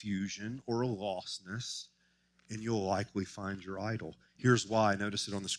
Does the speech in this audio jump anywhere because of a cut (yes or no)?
no